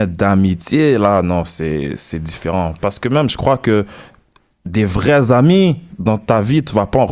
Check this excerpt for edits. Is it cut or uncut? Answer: uncut